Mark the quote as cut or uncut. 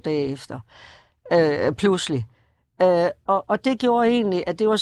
uncut